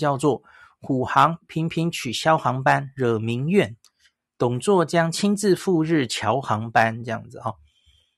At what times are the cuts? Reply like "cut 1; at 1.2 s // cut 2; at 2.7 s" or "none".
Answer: none